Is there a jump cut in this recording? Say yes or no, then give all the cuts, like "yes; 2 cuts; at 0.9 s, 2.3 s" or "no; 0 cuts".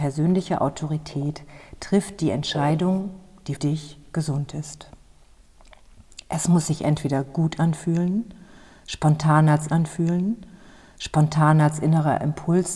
yes; 2 cuts; at 3.6 s, 9.7 s